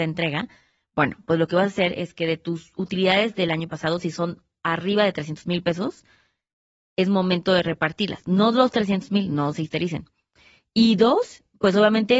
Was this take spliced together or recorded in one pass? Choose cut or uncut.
uncut